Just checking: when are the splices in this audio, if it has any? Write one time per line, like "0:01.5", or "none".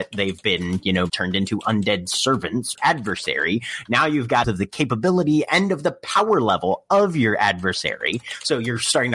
0:01.1
0:02.8
0:04.4